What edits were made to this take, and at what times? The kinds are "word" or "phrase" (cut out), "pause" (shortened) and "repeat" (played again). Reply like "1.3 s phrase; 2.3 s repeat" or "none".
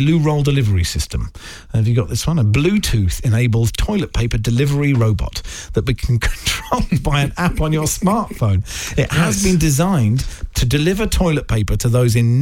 none